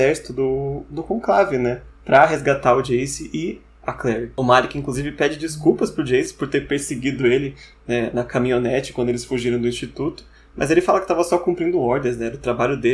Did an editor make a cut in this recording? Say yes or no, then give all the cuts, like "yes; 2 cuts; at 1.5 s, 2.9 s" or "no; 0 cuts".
no; 0 cuts